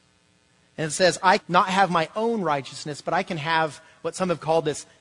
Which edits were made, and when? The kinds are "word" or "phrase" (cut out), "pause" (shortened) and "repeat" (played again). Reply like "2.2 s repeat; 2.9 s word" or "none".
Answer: 1.4 s word